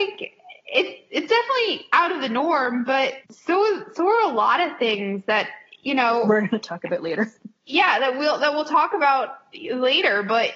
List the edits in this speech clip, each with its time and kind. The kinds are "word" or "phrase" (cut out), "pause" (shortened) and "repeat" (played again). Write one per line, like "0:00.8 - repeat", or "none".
0:03.2 - pause
0:07.4 - pause